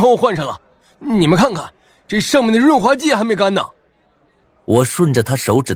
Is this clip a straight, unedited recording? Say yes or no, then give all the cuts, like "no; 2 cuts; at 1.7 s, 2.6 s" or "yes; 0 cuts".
yes; 0 cuts